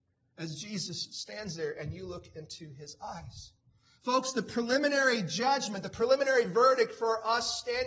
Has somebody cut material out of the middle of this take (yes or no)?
no